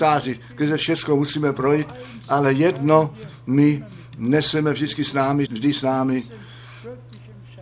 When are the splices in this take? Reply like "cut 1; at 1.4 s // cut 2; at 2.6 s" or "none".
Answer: cut 1; at 5.5 s